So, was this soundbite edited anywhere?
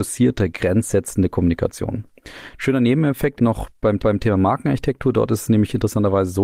yes; 2 cuts; at 3.4 s, 4.0 s

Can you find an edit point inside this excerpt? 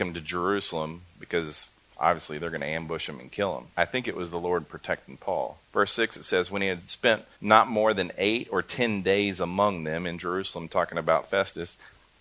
yes; 4 cuts; at 1.7 s, 3.7 s, 5.6 s, 7.3 s

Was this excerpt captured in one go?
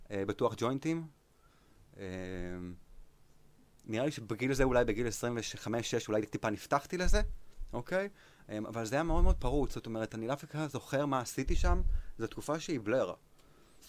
yes; 0 cuts

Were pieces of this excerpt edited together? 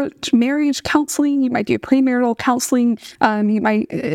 yes; 1 cut; at 3.2 s

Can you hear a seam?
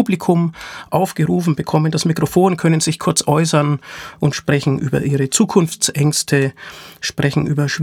no; 0 cuts

